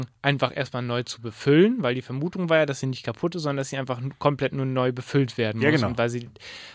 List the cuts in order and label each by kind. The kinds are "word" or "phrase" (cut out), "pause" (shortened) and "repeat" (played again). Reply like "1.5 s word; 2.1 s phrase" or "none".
none

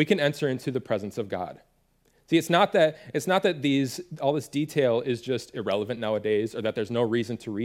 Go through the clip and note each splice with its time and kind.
none

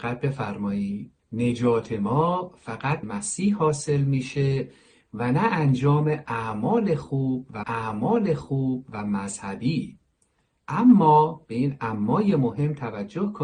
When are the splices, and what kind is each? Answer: 1.2 s pause; 3.0 s phrase; 7.6 s repeat

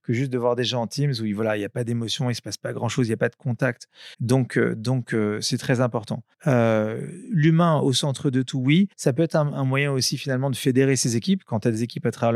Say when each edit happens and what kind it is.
4.1 s pause; 6.3 s pause; 8.9 s pause

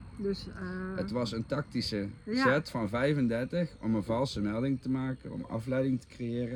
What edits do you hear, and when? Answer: none

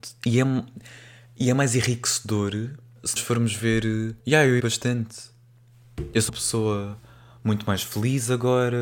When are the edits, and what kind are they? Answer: 3.2 s word; 4.2 s pause; 4.6 s word; 6.3 s word

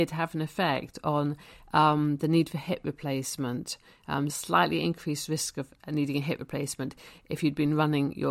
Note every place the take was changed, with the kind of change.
4.3 s word

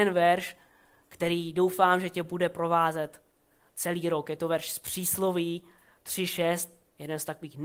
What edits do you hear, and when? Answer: none

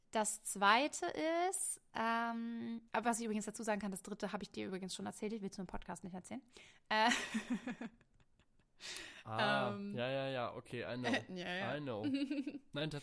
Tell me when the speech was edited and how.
2.9 s pause

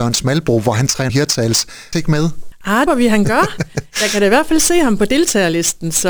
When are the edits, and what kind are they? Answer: 1.1 s phrase; 1.9 s phrase; 2.9 s phrase

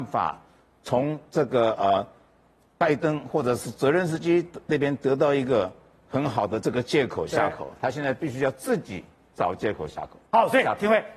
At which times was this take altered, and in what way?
none

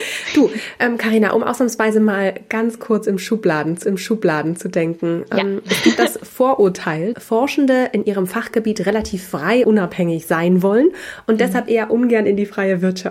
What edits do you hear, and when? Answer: 3.8 s repeat; 6.0 s word; 7.1 s word; 9.6 s word

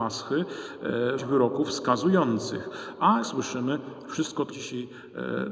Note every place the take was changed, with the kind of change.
1.2 s word; 3.2 s word; 4.5 s word

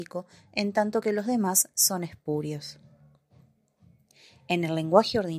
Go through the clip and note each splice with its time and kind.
none

